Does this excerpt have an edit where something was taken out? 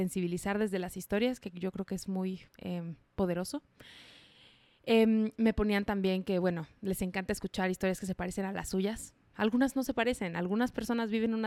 yes; 1 cut; at 2.5 s

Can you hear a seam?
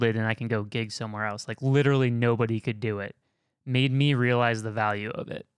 no; 0 cuts

